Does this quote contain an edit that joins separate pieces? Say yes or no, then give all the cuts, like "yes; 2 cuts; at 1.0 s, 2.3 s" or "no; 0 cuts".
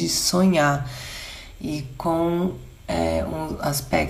no; 0 cuts